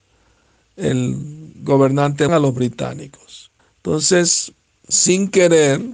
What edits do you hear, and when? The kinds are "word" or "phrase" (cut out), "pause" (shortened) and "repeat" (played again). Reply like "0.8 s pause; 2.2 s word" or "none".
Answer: 2.3 s word; 3.6 s pause